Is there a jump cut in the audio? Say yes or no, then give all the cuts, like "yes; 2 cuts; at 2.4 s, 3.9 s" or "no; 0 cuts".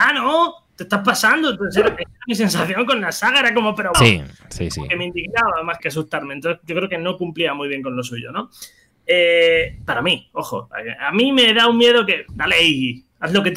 yes; 3 cuts; at 3.9 s, 5.8 s, 12.3 s